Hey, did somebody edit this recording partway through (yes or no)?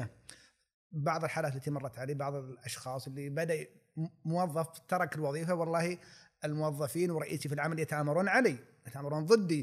no